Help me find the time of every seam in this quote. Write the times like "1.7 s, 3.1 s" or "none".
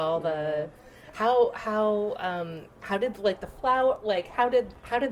none